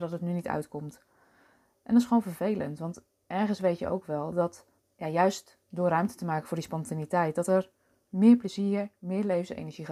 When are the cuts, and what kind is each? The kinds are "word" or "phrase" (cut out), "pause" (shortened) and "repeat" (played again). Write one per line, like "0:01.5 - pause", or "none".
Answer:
0:04.8 - pause

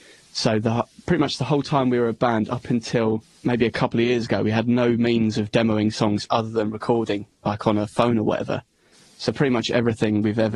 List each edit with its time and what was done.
0:03.3 - pause

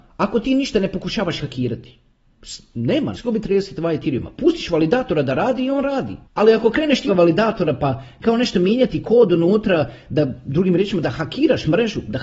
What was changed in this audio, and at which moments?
0:03.1 - word
0:06.2 - pause
0:07.1 - phrase

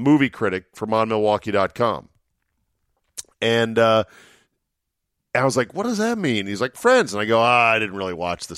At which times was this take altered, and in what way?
none

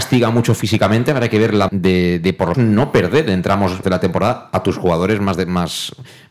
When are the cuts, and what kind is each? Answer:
0:01.7 - word
0:02.5 - word
0:03.8 - word

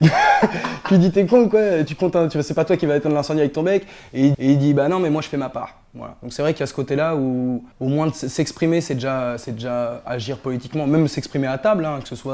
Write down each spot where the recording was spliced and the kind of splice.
0:01.9 - word
0:04.3 - repeat
0:07.7 - pause

